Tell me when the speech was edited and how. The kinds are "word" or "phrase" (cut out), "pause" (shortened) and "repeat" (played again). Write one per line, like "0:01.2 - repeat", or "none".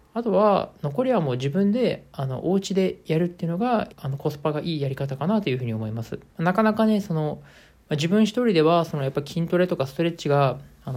0:03.9 - phrase
0:06.3 - pause